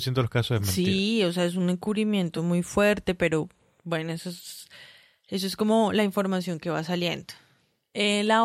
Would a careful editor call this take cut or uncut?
uncut